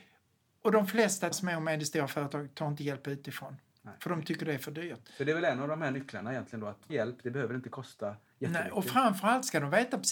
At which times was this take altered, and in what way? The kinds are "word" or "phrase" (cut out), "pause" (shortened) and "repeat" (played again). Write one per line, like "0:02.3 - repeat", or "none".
0:01.3 - word
0:06.9 - word